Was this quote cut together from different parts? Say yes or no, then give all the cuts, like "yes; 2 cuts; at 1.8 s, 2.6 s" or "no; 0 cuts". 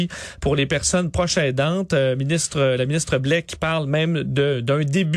no; 0 cuts